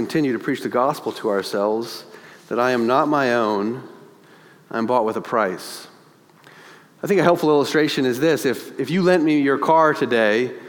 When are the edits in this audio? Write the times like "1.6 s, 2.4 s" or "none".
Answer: none

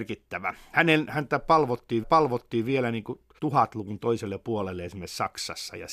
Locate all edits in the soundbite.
2.0 s, 3.4 s

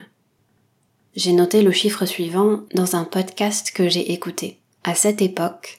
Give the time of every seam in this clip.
4.7 s

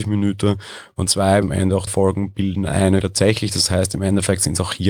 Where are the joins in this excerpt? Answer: 1.1 s, 1.4 s, 1.9 s, 3.0 s

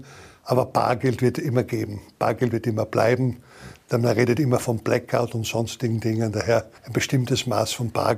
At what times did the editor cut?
6.8 s

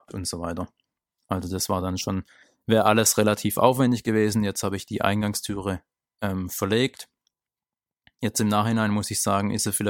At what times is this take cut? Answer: none

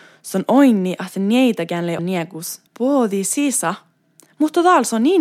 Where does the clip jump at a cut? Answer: 2.0 s, 2.7 s

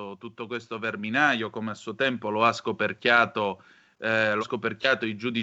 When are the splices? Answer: 4.4 s

